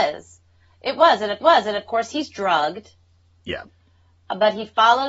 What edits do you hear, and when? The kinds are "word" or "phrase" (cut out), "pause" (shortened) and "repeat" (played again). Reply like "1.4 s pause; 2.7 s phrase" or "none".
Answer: 1.4 s repeat